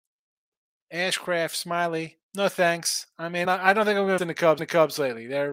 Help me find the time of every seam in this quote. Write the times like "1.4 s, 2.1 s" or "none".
2.2 s, 3.4 s, 4.2 s, 4.6 s